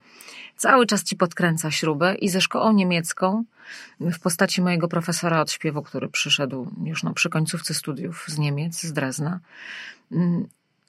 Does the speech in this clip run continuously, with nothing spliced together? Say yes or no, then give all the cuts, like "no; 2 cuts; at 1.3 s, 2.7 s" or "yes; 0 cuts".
yes; 0 cuts